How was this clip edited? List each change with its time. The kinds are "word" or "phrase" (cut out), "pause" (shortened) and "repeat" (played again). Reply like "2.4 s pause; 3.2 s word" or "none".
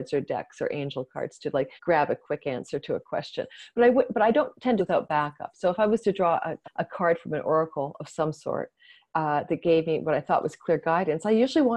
1.8 s pause; 4.8 s phrase; 6.6 s word